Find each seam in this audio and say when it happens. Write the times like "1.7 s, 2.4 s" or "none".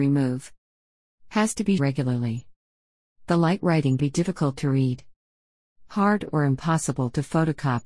1.8 s, 4.0 s